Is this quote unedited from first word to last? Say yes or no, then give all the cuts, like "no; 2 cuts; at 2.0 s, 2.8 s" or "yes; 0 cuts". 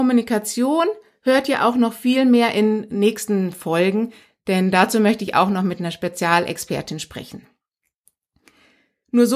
yes; 0 cuts